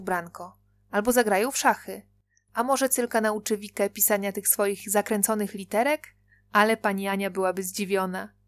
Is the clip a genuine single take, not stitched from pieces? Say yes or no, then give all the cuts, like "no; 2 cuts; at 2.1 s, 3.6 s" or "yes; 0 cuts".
yes; 0 cuts